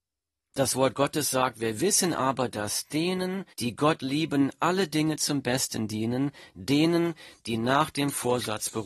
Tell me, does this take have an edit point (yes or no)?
yes